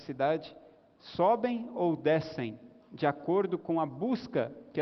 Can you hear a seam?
no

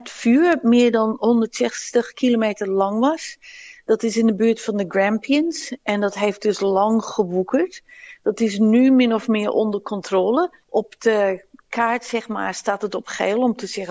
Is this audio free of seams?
no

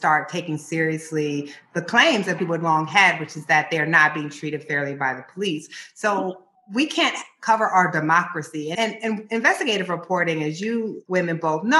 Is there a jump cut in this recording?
yes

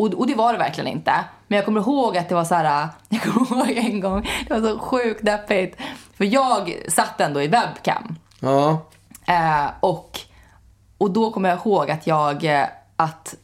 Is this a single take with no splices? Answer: yes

